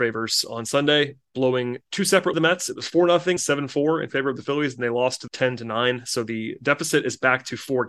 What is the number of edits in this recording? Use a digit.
3